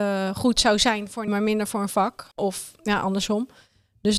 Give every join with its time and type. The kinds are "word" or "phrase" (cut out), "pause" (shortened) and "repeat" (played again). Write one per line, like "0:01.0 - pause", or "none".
0:01.3 - word
0:02.3 - pause